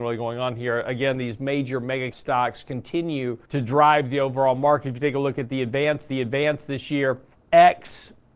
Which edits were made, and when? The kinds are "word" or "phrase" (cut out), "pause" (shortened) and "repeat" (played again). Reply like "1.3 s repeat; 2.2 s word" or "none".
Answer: 2.1 s word; 3.4 s pause; 6.1 s repeat; 7.3 s pause